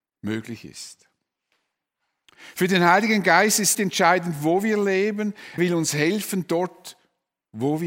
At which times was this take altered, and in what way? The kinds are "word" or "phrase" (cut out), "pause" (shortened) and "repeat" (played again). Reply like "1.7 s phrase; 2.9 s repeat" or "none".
3.7 s word; 5.6 s word